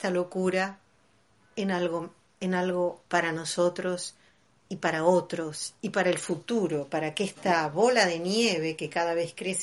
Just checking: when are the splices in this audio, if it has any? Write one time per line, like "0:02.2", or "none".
0:03.1